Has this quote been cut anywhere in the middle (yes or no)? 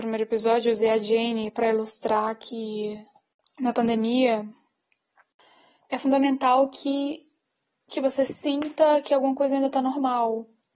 no